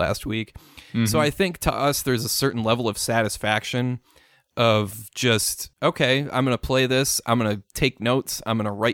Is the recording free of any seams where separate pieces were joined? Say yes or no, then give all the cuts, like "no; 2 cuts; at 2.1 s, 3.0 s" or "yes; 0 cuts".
no; 1 cut; at 5.7 s